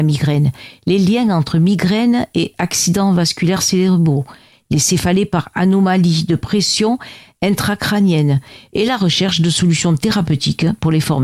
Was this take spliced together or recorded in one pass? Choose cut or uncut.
uncut